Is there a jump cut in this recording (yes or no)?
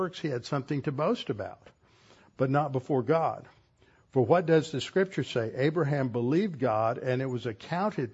no